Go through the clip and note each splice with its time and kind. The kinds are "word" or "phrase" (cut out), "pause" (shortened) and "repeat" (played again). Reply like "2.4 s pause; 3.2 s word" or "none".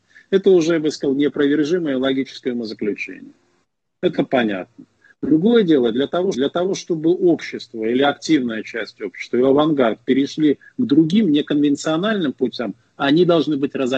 6.3 s repeat